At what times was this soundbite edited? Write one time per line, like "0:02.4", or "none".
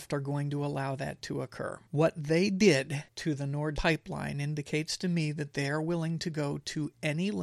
0:01.9
0:03.1
0:03.8